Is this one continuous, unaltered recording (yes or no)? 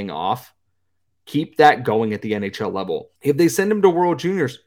no